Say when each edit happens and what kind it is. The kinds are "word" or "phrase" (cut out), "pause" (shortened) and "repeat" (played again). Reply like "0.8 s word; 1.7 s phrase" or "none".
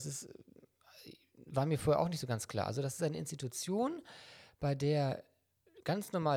none